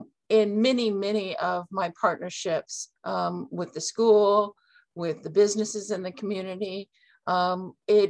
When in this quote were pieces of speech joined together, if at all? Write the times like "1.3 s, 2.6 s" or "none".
3.0 s